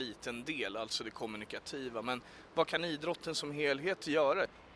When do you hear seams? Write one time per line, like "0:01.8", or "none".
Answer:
none